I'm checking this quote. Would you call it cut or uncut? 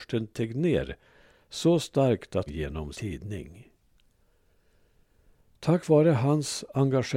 cut